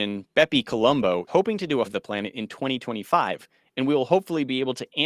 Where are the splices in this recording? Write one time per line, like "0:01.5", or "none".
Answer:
0:01.3
0:01.8